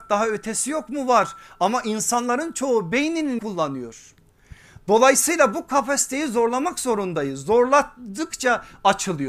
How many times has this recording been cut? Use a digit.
1